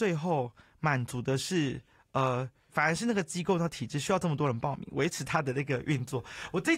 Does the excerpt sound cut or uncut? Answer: uncut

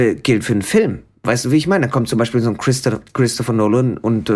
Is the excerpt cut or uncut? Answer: uncut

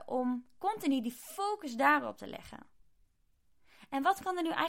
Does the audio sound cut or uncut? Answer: uncut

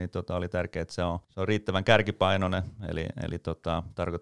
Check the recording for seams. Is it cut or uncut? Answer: cut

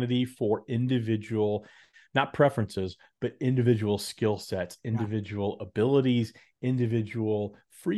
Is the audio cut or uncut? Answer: uncut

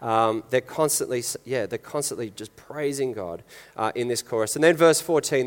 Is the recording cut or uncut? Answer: uncut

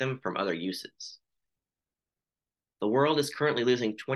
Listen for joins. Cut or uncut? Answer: uncut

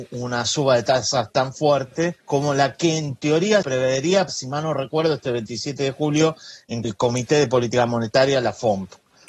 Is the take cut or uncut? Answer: cut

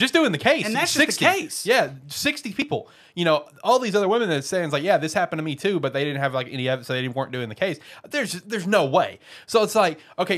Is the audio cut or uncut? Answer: uncut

